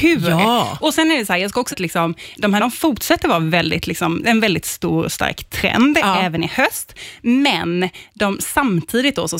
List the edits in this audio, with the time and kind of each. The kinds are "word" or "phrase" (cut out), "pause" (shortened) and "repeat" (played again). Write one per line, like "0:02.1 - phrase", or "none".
0:01.7 - word
0:02.6 - word